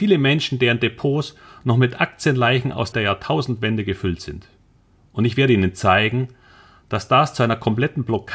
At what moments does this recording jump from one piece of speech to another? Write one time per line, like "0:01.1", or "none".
0:02.9
0:04.7

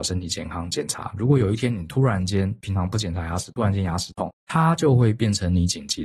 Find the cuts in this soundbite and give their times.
0:04.4

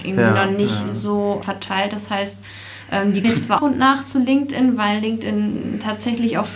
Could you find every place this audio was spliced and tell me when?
0:01.4
0:03.2
0:03.6

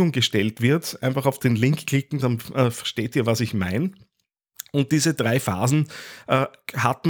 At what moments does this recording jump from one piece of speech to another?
none

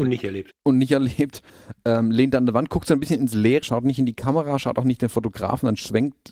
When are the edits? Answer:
0:03.6

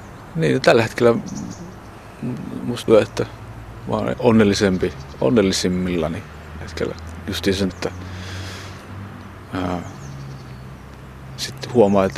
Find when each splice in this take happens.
0:02.9
0:04.1
0:06.6
0:07.7

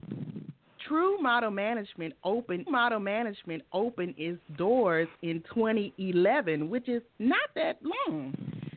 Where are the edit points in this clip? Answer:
0:02.7
0:07.1

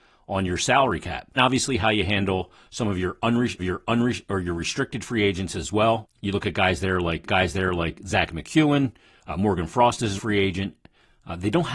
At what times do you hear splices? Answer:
0:01.4
0:03.6
0:07.3
0:10.2

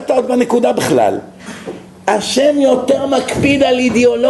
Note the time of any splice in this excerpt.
none

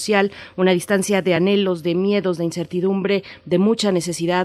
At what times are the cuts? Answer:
none

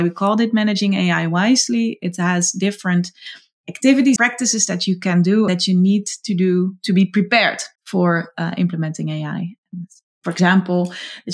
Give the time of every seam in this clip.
0:04.2
0:05.5
0:07.8

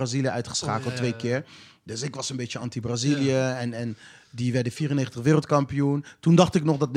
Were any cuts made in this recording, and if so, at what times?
none

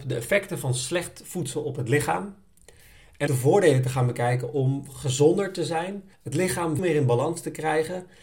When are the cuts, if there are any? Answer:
0:03.3
0:04.9
0:06.1
0:06.8

